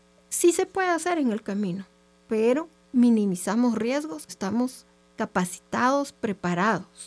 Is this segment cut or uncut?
cut